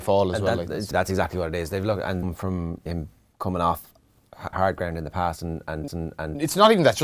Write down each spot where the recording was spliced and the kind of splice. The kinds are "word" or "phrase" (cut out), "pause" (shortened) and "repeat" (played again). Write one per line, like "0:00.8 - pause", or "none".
0:00.9 - word
0:02.2 - phrase
0:02.9 - word
0:04.5 - word
0:05.9 - repeat